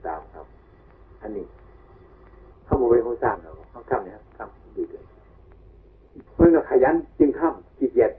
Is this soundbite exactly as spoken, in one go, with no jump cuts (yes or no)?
no